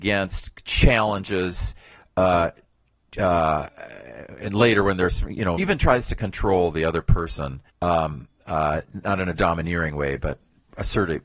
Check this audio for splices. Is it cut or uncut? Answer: cut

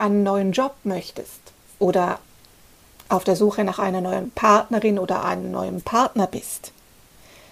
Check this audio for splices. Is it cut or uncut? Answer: uncut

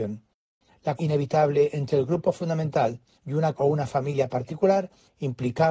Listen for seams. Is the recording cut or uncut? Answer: cut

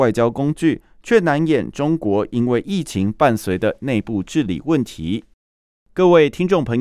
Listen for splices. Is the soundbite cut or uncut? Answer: uncut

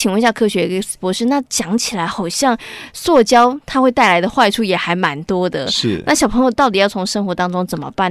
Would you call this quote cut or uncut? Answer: cut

